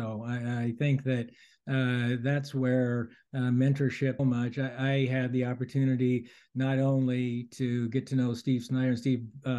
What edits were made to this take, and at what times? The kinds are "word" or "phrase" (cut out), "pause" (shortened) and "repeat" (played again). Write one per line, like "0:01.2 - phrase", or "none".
0:04.2 - phrase